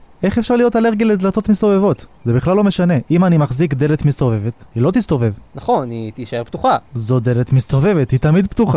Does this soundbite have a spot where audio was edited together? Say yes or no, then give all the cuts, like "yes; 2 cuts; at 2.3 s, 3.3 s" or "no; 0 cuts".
yes; 1 cut; at 6.9 s